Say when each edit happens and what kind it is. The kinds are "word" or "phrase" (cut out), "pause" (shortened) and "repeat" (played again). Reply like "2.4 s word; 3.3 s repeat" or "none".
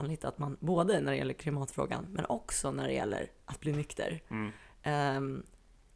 none